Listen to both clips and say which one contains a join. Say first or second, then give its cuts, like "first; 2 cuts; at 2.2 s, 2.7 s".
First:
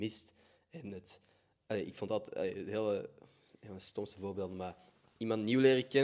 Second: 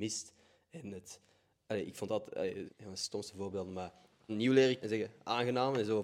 second; 3 cuts; at 2.7 s, 4.3 s, 4.8 s